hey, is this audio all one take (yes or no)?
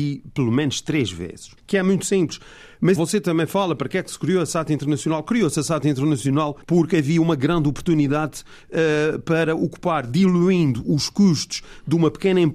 no